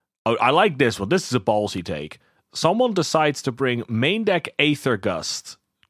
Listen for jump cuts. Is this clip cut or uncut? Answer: uncut